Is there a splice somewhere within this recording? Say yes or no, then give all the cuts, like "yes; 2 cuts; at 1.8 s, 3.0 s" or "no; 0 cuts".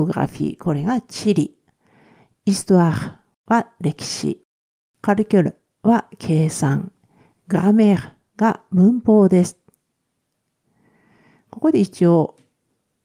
no; 0 cuts